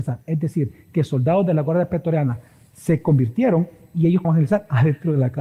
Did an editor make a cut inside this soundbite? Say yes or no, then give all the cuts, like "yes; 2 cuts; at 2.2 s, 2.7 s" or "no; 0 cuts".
yes; 1 cut; at 4.2 s